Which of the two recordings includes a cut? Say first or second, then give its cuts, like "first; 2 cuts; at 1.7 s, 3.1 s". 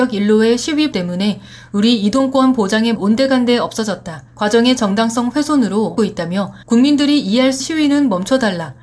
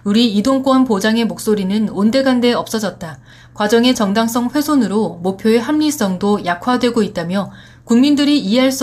first; 6 cuts; at 0.9 s, 2.9 s, 4.3 s, 6.0 s, 6.6 s, 7.6 s